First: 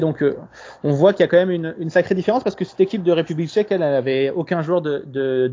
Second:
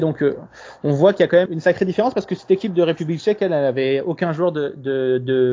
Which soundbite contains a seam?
second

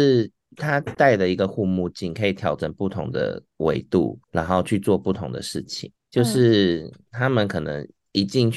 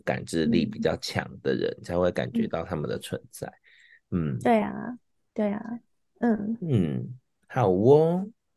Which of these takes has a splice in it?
first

